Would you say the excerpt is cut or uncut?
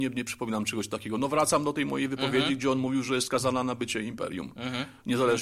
uncut